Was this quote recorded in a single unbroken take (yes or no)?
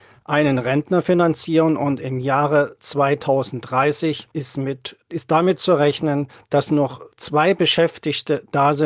no